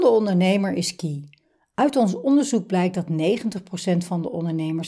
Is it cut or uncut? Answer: uncut